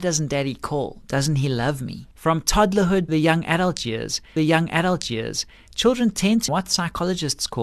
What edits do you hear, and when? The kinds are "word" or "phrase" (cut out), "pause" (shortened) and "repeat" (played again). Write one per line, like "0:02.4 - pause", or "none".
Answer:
0:02.1 - pause
0:03.1 - word
0:04.4 - repeat
0:06.5 - phrase